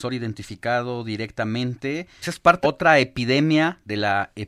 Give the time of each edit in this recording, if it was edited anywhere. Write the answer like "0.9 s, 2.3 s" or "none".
2.2 s, 2.6 s